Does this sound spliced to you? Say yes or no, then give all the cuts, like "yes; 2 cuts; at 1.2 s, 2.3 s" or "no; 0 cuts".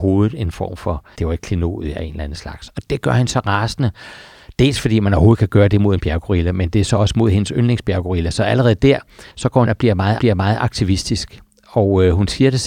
yes; 4 cuts; at 1.1 s, 9.3 s, 9.7 s, 10.2 s